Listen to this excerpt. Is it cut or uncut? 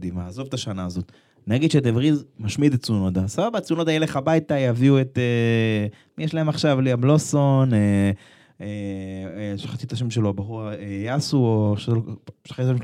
uncut